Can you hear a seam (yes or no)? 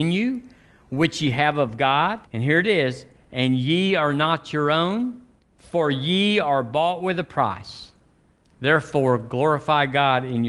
yes